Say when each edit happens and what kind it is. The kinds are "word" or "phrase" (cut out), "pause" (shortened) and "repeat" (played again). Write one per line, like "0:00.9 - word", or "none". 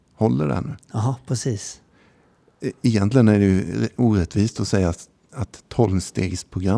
none